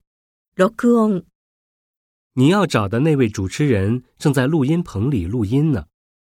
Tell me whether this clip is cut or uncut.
uncut